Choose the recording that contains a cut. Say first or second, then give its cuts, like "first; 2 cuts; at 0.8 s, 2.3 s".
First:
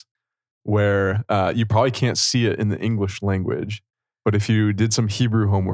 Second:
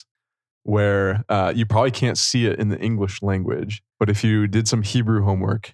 second; 1 cut; at 3.9 s